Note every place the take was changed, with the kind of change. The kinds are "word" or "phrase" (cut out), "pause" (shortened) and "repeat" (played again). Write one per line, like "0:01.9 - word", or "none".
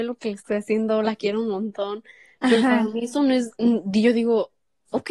none